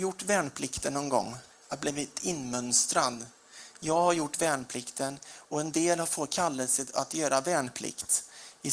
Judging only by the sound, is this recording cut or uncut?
cut